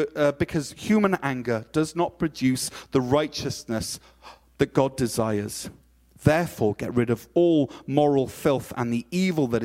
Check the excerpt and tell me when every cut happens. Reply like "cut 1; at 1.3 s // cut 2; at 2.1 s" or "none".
none